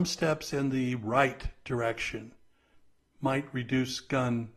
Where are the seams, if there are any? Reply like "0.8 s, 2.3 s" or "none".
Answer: none